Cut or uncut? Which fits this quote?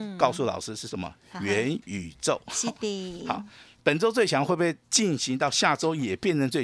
cut